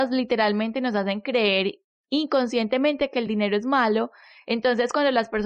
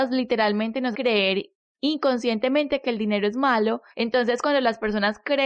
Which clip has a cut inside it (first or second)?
second